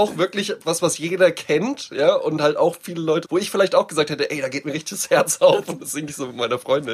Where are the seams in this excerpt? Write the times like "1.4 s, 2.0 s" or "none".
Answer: 3.2 s